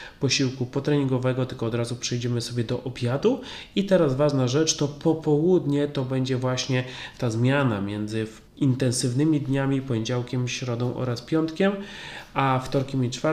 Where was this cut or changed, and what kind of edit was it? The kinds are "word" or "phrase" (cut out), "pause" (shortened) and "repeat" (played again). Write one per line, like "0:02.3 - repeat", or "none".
0:08.5 - pause